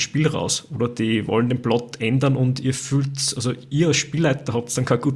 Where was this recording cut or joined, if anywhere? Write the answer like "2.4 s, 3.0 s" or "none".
none